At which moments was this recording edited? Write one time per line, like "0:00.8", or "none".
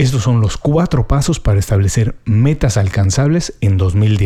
none